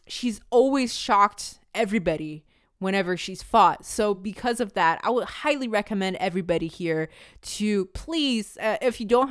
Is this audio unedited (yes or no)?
yes